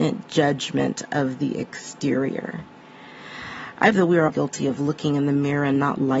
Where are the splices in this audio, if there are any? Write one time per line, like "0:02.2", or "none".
0:03.9
0:04.3